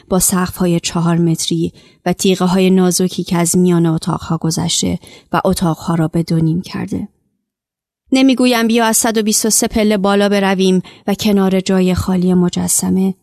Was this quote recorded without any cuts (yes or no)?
yes